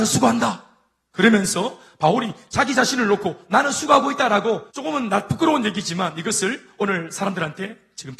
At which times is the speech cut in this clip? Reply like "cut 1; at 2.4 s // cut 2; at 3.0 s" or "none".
cut 1; at 4.7 s